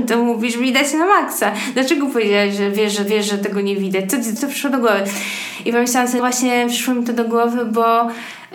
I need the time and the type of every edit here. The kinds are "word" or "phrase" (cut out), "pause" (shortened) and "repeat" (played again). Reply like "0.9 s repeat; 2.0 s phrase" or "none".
3.1 s repeat; 4.4 s word; 6.2 s word